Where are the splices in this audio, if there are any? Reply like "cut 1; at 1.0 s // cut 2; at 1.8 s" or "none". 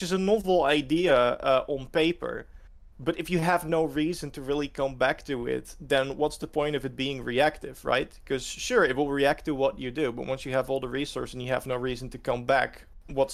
none

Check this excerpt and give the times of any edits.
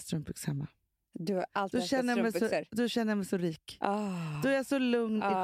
none

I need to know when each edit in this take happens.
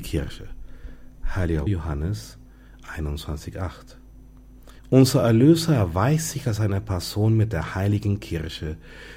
cut 1; at 1.7 s // cut 2; at 4.8 s

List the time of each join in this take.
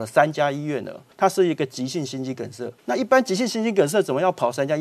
cut 1; at 1.1 s // cut 2; at 2.8 s

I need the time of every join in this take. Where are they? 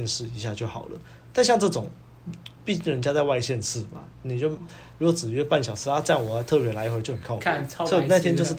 none

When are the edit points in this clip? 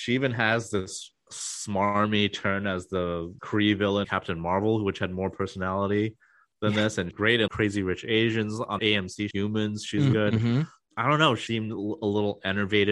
cut 1; at 3.4 s // cut 2; at 4.0 s // cut 3; at 7.1 s // cut 4; at 7.5 s // cut 5; at 8.8 s // cut 6; at 9.3 s // cut 7; at 10.1 s // cut 8; at 11.5 s

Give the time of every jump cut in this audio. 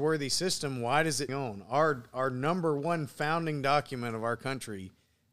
cut 1; at 1.3 s

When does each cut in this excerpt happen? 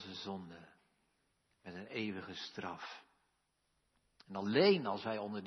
none

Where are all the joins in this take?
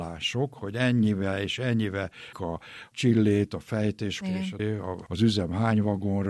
cut 1; at 2.3 s // cut 2; at 4.2 s // cut 3; at 4.6 s

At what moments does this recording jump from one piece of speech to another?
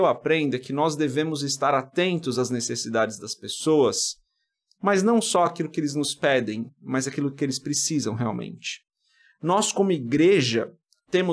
none

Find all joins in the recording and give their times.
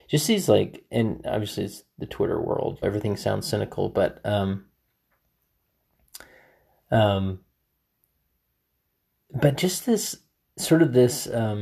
cut 1; at 2.8 s

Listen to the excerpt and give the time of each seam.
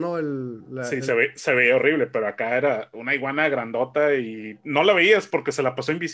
none

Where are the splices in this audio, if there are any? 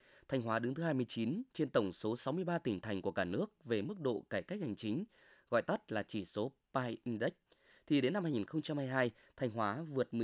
none

